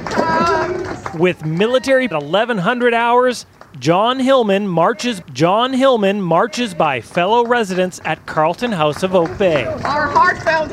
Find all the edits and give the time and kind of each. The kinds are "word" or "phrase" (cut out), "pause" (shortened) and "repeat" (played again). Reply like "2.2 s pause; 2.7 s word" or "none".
2.1 s phrase; 5.2 s repeat